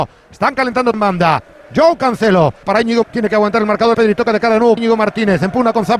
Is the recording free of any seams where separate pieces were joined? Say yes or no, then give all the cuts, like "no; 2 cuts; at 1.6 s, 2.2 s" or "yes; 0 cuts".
no; 5 cuts; at 0.9 s, 2.6 s, 3.0 s, 3.9 s, 4.8 s